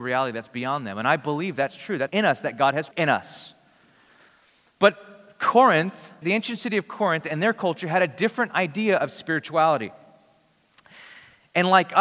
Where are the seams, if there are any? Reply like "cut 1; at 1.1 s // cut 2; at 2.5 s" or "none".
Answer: cut 1; at 2.1 s // cut 2; at 2.9 s // cut 3; at 6.2 s